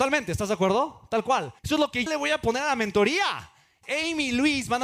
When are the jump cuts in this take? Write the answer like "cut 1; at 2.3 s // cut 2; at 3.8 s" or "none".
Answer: cut 1; at 1.6 s // cut 2; at 2.1 s // cut 3; at 3.8 s